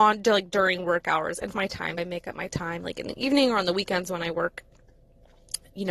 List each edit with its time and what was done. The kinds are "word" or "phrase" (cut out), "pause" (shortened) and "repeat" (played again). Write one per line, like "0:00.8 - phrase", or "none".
0:01.5 - word
0:02.0 - word